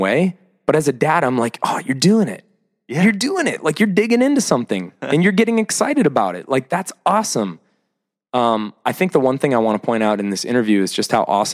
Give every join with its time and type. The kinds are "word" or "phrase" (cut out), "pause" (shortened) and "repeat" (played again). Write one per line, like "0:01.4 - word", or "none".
none